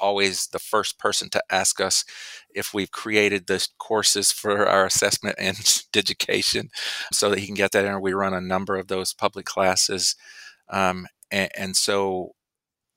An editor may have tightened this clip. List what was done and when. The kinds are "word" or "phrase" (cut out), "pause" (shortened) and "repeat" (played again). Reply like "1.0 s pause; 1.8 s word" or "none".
7.1 s word; 9.4 s word